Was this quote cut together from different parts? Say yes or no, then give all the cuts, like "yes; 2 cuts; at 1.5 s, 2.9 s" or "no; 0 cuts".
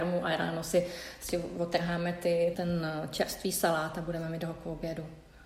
yes; 1 cut; at 2.5 s